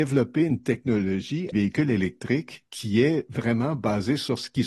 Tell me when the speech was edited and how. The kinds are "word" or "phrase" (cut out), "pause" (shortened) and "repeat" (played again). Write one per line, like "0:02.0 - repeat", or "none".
0:01.5 - phrase
0:02.7 - pause